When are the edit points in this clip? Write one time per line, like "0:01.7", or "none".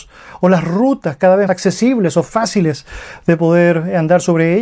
0:01.5